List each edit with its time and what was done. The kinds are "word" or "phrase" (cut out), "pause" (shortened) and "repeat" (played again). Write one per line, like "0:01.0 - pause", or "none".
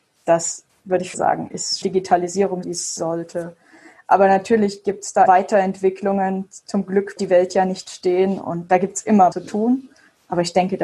0:01.1 - word
0:01.8 - word
0:02.6 - word
0:03.0 - word
0:05.3 - word
0:07.2 - word
0:09.3 - word

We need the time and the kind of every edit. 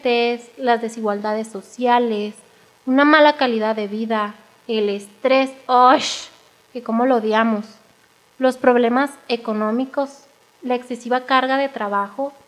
none

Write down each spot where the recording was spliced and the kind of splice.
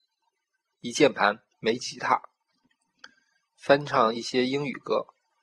none

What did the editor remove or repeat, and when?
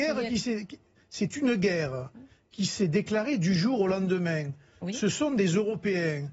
none

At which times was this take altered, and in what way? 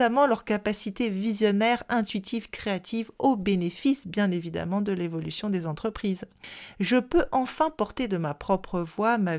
none

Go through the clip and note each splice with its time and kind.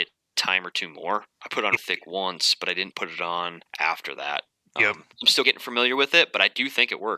0:01.8 - word
0:03.7 - pause
0:05.1 - pause
0:05.4 - phrase

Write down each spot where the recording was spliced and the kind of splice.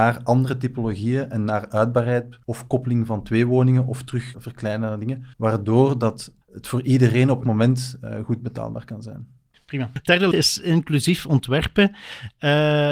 0:02.4 - pause
0:04.3 - word
0:05.3 - pause
0:06.4 - word
0:07.4 - word
0:10.3 - phrase

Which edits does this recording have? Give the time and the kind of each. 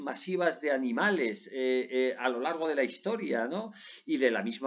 none

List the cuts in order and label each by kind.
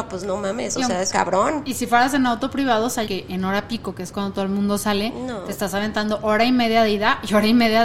0:01.1 - word
0:03.1 - phrase

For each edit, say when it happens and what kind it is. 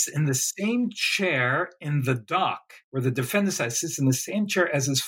0:02.8 - pause

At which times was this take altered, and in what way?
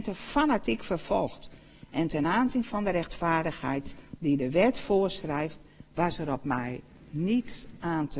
none

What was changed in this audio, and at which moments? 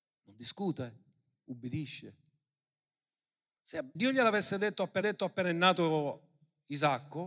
0:04.0 - word
0:05.0 - repeat

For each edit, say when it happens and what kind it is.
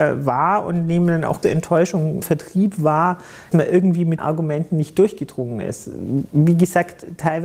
0:01.4 - word
0:02.2 - word
0:03.5 - word
0:04.2 - word

